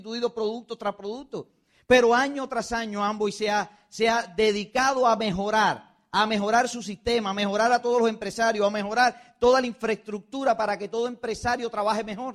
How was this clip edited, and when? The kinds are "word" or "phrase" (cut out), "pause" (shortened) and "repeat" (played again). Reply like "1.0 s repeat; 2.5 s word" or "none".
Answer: none